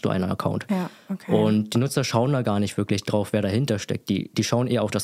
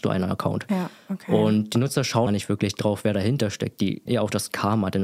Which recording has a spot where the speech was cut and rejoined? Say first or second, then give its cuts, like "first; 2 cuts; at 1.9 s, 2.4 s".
second; 2 cuts; at 2.3 s, 4.1 s